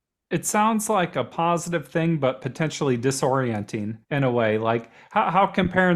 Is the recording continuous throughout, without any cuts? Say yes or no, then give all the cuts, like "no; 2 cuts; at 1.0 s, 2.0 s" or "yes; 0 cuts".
no; 1 cut; at 4.0 s